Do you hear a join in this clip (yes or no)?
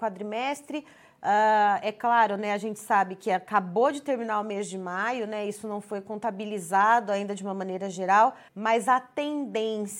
yes